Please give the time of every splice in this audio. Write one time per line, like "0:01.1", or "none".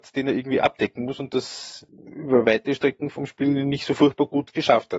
none

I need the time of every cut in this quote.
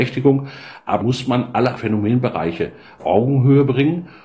0:01.0
0:01.8
0:03.0

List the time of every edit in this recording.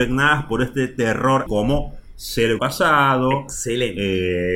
0:01.5
0:02.6

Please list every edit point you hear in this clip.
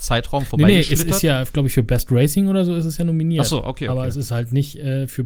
none

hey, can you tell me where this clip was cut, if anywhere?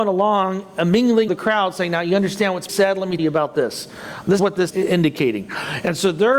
0:01.3
0:02.7
0:03.2
0:04.4
0:04.7

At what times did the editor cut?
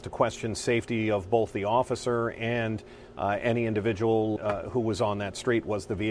0:04.4

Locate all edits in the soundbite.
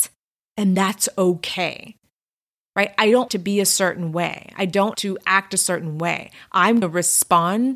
0:03.3
0:04.9
0:06.8

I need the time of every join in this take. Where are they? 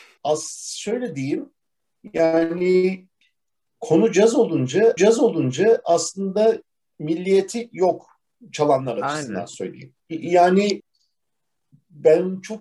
0:05.0
0:10.0

